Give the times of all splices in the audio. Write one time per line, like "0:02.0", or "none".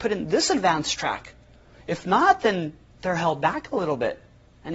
0:02.9